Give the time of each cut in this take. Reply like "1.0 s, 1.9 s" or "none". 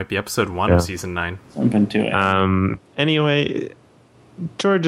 2.9 s